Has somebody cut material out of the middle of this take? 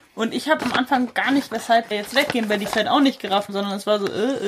yes; 4 cuts; at 1.5 s, 1.9 s, 2.7 s, 3.5 s

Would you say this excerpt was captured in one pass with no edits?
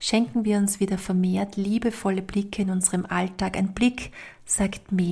yes; 0 cuts

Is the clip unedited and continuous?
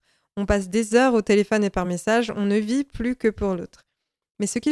yes; 0 cuts

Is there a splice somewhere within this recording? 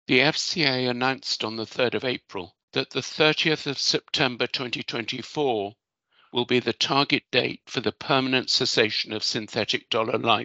yes; 1 cut; at 2.6 s

